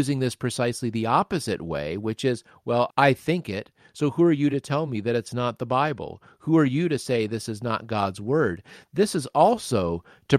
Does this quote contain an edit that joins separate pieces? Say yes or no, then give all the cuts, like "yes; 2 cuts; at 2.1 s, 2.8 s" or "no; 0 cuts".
no; 0 cuts